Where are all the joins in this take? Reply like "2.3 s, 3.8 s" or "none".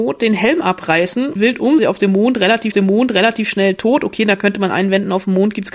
1.4 s, 1.8 s, 2.7 s